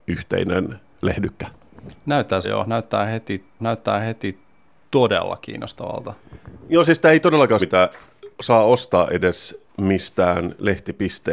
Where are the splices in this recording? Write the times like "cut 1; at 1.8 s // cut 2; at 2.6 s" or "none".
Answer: cut 1; at 2.4 s // cut 2; at 3.6 s // cut 3; at 7.6 s // cut 4; at 8.3 s // cut 5; at 9.7 s